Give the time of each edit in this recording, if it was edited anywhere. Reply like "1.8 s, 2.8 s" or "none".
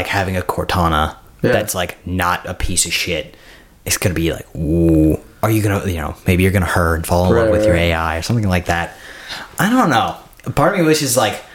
none